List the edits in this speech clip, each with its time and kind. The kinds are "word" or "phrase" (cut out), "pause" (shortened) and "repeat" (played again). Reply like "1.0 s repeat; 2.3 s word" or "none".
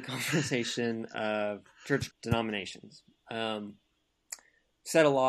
2.1 s word